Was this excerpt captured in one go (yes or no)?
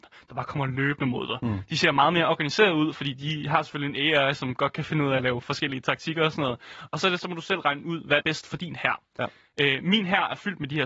no